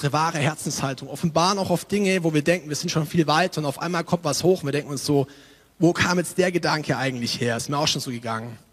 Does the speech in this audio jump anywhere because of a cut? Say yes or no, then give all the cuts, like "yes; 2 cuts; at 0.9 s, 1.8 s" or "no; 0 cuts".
no; 0 cuts